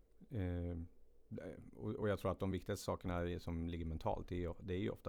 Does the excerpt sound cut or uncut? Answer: uncut